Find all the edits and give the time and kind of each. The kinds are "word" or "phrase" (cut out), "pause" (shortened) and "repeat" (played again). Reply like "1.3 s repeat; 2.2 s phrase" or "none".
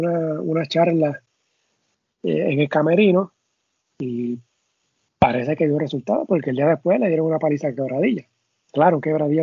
none